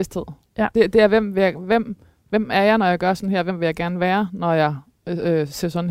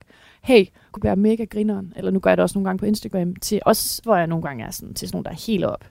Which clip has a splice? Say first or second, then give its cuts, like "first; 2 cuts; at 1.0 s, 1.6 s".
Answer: second; 2 cuts; at 1.0 s, 4.0 s